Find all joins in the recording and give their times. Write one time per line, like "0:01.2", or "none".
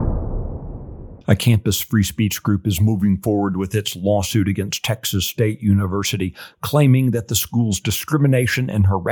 0:01.2